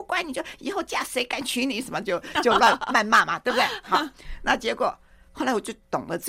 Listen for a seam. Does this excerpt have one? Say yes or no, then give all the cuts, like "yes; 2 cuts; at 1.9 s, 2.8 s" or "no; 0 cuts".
no; 0 cuts